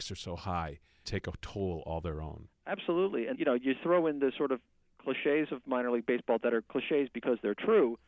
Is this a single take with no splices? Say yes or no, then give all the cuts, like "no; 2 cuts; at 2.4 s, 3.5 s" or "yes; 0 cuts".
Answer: no; 2 cuts; at 1.0 s, 3.3 s